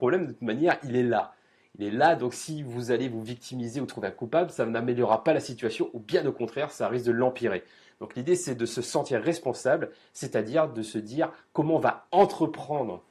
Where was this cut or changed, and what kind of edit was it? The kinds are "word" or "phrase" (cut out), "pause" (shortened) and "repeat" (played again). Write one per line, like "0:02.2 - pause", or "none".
none